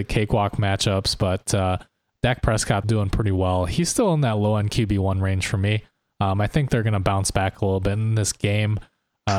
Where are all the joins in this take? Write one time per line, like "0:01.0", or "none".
0:02.8